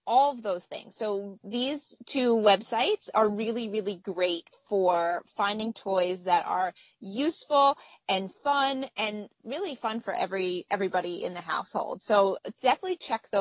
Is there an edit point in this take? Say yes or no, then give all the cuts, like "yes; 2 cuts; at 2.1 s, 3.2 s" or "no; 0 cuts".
no; 0 cuts